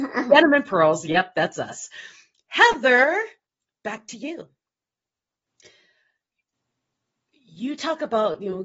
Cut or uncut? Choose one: cut